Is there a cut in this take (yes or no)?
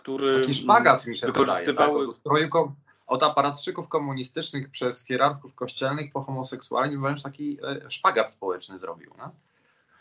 no